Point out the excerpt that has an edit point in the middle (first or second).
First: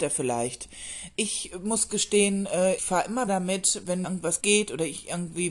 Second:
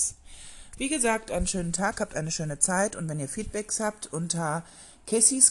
first